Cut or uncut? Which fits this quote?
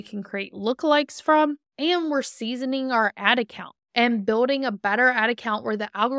cut